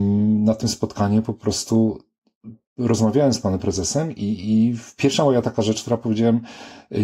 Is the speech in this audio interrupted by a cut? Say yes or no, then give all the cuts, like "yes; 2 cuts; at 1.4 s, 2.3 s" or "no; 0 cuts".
no; 0 cuts